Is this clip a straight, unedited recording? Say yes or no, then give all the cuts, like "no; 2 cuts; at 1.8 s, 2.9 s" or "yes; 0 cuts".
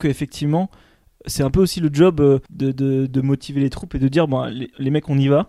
no; 2 cuts; at 2.5 s, 3.1 s